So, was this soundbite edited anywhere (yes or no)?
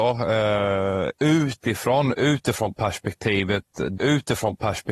yes